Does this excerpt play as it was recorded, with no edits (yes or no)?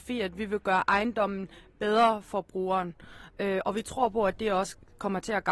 yes